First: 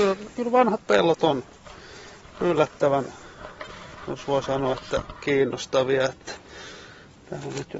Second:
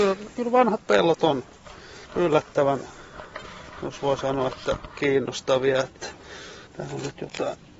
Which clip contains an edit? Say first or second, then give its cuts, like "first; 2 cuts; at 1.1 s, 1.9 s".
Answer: second; 2 cuts; at 2.0 s, 6.7 s